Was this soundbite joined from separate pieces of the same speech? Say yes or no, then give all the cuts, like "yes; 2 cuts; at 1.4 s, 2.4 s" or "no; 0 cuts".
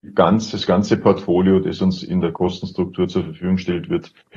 no; 0 cuts